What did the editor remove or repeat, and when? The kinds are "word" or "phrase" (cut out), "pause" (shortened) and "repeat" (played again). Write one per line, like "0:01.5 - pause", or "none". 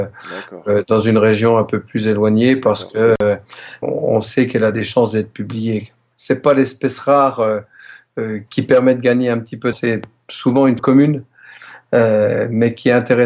0:03.8 - word
0:08.5 - word
0:09.7 - word
0:10.8 - word